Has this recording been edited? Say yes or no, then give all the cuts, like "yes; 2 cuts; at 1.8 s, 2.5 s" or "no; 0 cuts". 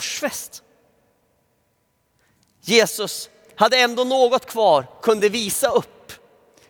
yes; 1 cut; at 5.0 s